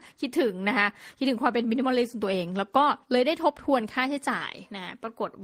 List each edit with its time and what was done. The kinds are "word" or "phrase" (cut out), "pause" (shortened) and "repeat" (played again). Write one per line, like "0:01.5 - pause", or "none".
0:03.0 - pause

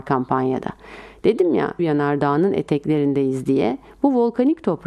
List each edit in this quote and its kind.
0:01.8 - word

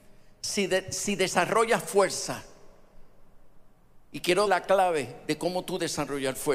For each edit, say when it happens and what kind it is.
0:04.5 - word

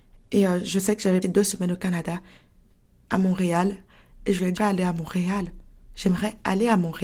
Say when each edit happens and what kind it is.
0:01.2 - word
0:04.6 - word

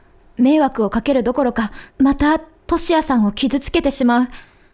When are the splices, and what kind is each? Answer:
0:01.9 - pause

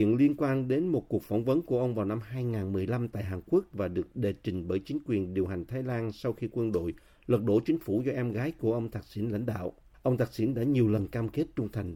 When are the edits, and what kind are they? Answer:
0:09.9 - pause

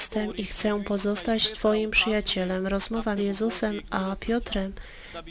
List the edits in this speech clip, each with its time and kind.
0:03.2 - word

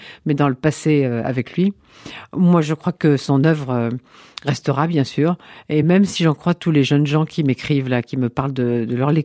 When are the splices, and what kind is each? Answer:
none

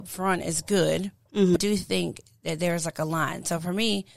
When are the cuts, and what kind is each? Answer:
0:01.6 - word

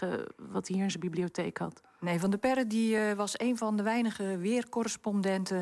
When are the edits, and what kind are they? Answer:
none

